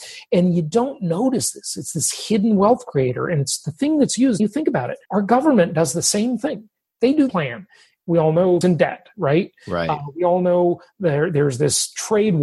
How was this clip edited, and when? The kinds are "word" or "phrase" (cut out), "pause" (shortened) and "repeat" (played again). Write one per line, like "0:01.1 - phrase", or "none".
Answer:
0:04.4 - word
0:05.0 - pause
0:07.3 - phrase
0:08.6 - phrase